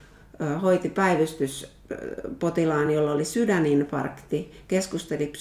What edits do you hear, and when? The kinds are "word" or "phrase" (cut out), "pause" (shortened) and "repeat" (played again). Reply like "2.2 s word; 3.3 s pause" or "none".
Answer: none